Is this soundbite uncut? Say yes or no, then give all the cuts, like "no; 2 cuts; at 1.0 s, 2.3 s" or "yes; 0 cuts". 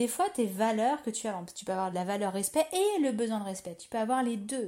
no; 1 cut; at 1.9 s